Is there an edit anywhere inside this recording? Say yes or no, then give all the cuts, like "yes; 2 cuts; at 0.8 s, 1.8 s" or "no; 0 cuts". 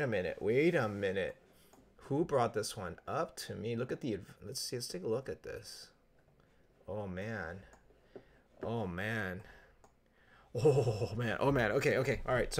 no; 0 cuts